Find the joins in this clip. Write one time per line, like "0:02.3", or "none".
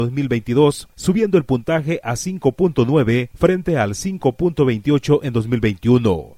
none